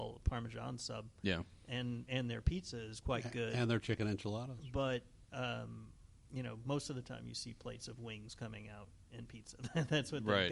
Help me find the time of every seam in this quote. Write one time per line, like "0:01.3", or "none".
none